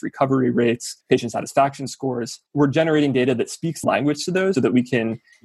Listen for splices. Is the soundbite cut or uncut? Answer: cut